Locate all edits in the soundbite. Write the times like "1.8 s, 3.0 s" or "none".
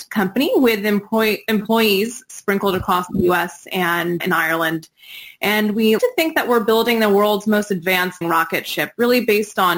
4.2 s, 6.0 s, 8.2 s